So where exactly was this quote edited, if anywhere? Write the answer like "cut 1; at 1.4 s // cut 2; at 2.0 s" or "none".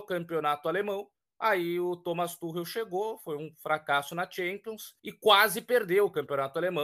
cut 1; at 1.1 s // cut 2; at 5.0 s